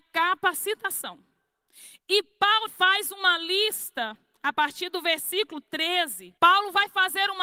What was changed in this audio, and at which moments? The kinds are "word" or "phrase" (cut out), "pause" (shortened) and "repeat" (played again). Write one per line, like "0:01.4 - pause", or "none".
0:02.7 - word
0:06.4 - pause